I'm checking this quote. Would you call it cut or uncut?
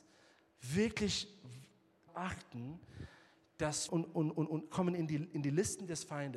cut